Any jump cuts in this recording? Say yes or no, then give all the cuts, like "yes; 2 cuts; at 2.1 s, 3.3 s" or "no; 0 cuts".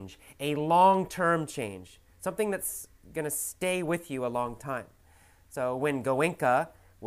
no; 0 cuts